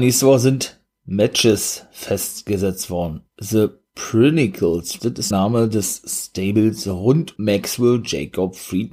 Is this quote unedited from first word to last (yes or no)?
no